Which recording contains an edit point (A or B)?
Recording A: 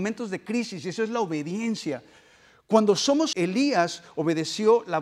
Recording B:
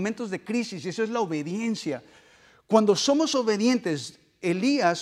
A